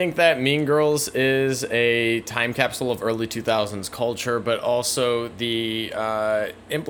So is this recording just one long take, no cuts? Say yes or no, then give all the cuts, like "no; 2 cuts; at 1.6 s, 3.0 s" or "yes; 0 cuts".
yes; 0 cuts